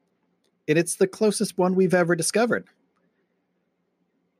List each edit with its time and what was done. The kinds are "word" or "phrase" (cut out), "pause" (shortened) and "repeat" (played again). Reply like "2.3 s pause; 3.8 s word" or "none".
none